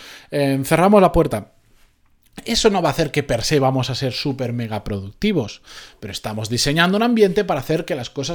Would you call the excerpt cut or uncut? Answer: uncut